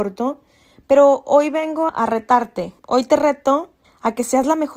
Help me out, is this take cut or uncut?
cut